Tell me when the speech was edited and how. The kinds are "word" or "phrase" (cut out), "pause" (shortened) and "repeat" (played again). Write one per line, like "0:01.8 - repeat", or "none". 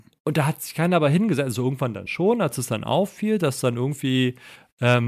none